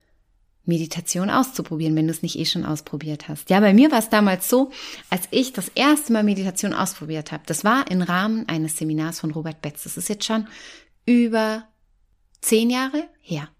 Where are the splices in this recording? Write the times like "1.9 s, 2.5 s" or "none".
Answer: none